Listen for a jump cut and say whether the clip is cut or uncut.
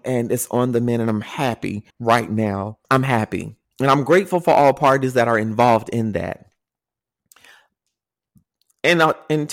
cut